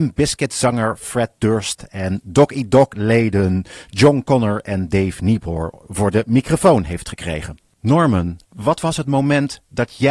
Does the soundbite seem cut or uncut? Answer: cut